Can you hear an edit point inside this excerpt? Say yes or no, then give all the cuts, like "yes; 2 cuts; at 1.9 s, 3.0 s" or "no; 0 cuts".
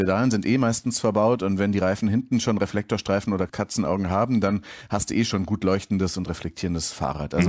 no; 0 cuts